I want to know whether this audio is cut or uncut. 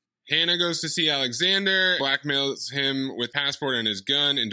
cut